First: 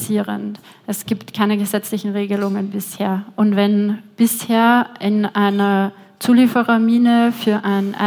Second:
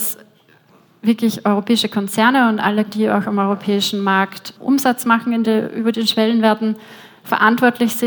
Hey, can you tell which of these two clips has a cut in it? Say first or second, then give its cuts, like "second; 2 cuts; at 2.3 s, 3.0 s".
second; 3 cuts; at 2.9 s, 4.6 s, 5.4 s